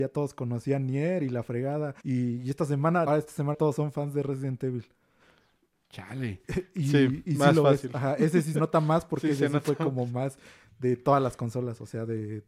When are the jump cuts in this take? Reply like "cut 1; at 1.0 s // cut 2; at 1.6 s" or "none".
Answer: cut 1; at 2.0 s // cut 2; at 3.1 s // cut 3; at 3.5 s // cut 4; at 8.5 s